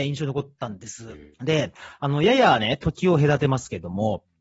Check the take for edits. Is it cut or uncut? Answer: cut